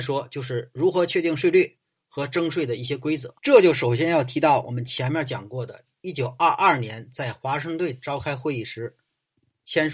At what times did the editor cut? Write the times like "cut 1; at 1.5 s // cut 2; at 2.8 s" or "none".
cut 1; at 3.4 s